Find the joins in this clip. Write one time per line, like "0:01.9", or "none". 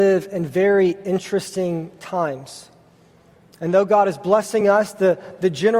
none